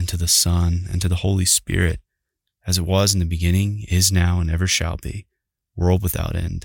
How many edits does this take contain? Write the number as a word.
zero